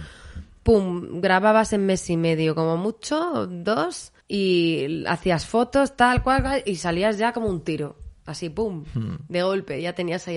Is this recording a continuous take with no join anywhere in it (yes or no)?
no